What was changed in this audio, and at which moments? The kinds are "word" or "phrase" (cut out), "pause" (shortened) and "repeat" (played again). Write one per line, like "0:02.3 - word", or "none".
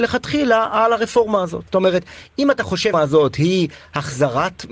0:01.7 - pause
0:02.9 - word